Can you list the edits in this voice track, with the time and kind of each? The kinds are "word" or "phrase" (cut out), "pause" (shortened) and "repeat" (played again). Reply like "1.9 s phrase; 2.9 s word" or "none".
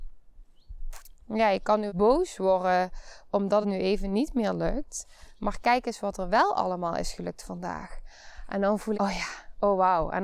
1.9 s word; 3.6 s phrase; 8.9 s word